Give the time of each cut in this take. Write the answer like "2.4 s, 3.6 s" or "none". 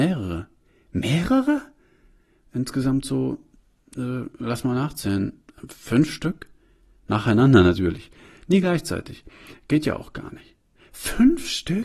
none